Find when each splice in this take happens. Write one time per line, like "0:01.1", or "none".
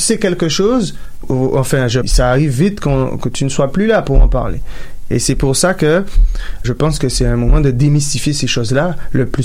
0:01.2
0:02.0
0:06.6